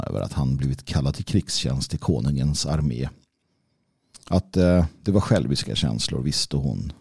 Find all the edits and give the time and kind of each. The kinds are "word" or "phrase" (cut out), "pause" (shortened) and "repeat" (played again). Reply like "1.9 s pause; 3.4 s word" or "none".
none